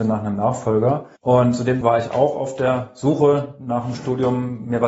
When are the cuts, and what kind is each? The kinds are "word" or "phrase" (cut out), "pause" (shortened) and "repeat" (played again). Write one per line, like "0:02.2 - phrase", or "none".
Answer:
0:01.2 - pause
0:01.8 - word